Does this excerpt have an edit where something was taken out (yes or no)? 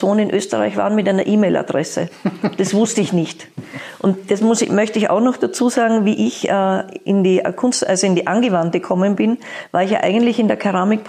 no